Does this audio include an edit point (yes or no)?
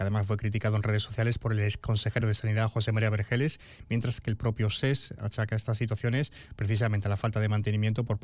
no